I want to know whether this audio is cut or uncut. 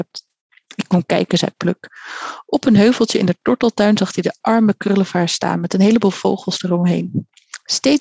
uncut